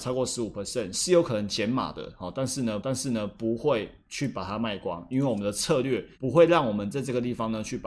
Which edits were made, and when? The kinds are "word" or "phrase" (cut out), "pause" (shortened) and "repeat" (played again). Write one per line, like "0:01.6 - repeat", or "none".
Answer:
0:02.8 - repeat
0:06.1 - pause